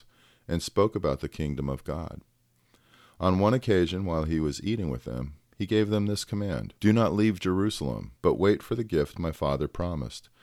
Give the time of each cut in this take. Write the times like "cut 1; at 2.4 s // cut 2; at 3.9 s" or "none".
cut 1; at 6.8 s // cut 2; at 8.2 s